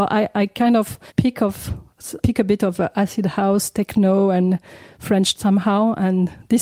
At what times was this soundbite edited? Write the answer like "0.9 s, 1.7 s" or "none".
1.1 s, 2.2 s, 5.3 s